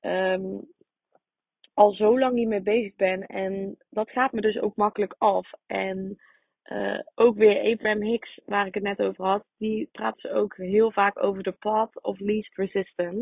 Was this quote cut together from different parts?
no; 0 cuts

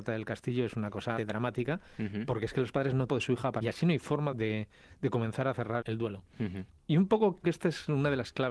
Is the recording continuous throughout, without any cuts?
no; 6 cuts; at 1.2 s, 3.1 s, 3.6 s, 4.3 s, 5.8 s, 7.4 s

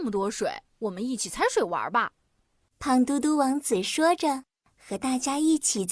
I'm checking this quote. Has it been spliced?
no; 0 cuts

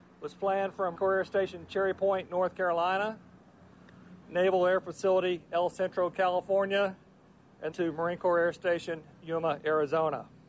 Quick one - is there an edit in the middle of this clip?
yes; 3 cuts; at 1.0 s, 4.2 s, 7.7 s

